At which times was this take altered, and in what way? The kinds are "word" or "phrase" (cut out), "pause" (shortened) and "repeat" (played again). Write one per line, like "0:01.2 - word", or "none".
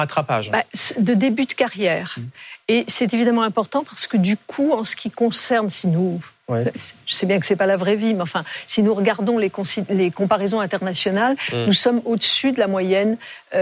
none